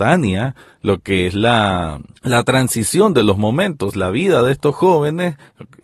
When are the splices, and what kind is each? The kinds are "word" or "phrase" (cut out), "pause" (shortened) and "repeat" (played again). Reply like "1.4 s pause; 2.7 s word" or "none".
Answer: 2.1 s pause